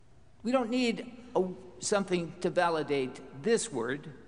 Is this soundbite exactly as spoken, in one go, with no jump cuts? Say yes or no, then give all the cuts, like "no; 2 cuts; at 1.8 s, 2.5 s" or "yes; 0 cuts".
yes; 0 cuts